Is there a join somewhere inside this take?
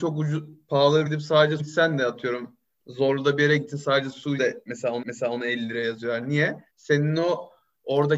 yes; 6 cuts; at 1.1 s, 1.6 s, 2.7 s, 4.4 s, 5.0 s, 6.7 s

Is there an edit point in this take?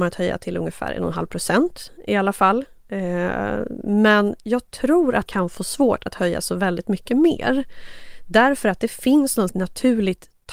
yes; 2 cuts; at 5.3 s, 9.5 s

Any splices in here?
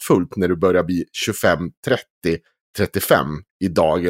no; 0 cuts

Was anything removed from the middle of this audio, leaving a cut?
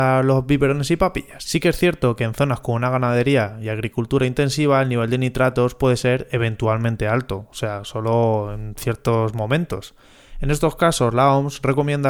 no; 0 cuts

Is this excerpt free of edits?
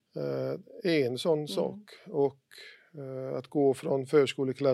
yes; 0 cuts

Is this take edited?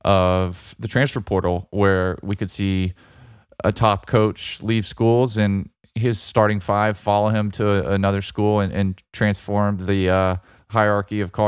no; 0 cuts

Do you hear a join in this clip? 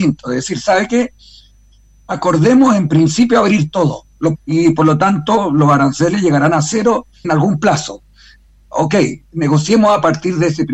yes; 2 cuts; at 4.3 s, 7.2 s

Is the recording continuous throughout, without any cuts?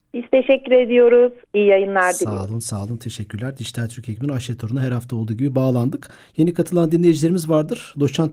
yes; 0 cuts

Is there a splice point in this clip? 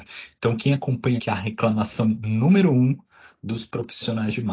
yes; 1 cut; at 1.2 s

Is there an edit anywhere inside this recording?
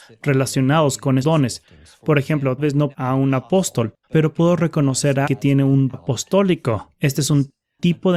yes; 6 cuts; at 1.2 s, 2.6 s, 2.9 s, 4.0 s, 5.2 s, 5.9 s

